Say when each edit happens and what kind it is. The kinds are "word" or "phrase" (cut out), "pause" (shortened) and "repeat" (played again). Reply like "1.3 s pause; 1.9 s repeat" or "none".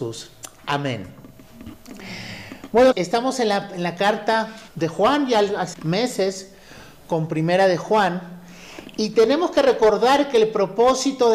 2.9 s word; 4.7 s pause; 5.7 s word